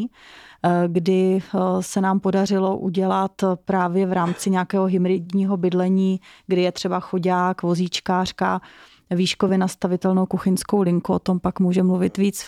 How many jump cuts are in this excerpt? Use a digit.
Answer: 0